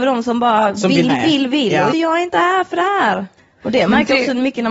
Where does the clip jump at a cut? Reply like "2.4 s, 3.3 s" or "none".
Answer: 1.1 s, 1.9 s, 3.4 s